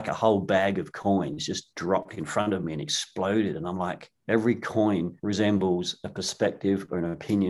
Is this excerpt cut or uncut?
cut